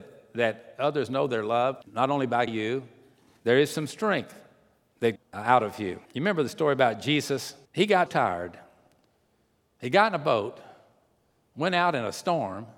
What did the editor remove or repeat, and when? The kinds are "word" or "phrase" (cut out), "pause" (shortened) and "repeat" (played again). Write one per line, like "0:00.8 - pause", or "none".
0:01.8 - pause
0:02.5 - phrase
0:05.2 - word
0:06.0 - pause
0:07.6 - pause
0:08.1 - word